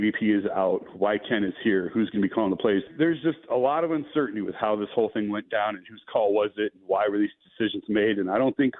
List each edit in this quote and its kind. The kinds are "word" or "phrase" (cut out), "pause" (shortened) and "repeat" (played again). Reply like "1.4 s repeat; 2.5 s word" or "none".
none